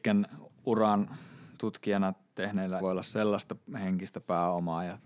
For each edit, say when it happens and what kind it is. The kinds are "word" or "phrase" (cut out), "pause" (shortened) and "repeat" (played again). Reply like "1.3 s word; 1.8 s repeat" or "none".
2.8 s word